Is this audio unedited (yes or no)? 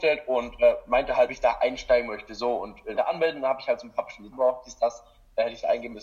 no